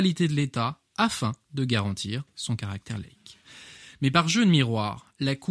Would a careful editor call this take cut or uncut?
uncut